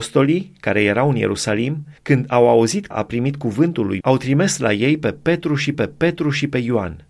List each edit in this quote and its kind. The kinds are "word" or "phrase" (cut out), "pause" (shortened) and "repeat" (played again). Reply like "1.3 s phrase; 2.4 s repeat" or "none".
2.0 s pause; 2.9 s word; 4.0 s word; 5.7 s repeat